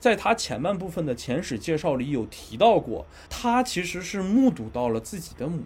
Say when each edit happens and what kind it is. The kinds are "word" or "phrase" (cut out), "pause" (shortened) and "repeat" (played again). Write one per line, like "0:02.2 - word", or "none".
0:03.3 - pause